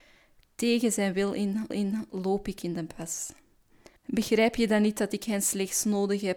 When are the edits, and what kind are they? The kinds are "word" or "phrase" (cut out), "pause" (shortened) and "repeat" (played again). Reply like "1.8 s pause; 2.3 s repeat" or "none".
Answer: 1.7 s repeat; 4.0 s pause